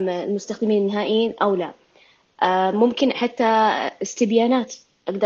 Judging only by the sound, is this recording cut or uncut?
uncut